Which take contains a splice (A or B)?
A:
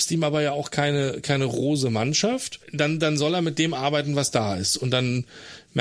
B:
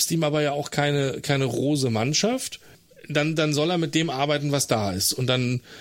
A